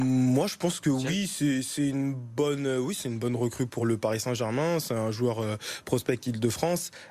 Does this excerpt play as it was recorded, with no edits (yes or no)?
yes